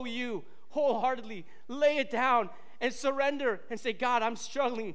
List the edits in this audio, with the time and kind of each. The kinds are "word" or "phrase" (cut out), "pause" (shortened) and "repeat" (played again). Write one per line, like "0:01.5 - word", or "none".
none